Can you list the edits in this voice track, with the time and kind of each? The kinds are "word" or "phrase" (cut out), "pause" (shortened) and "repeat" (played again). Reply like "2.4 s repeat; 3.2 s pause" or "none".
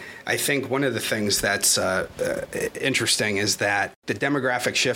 none